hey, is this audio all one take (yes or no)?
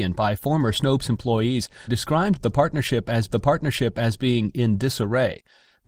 no